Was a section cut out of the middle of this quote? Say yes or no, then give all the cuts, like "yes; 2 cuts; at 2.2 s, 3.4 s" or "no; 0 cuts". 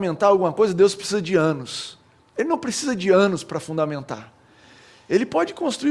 no; 0 cuts